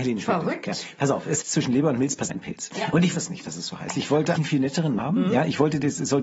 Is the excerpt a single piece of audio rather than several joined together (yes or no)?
no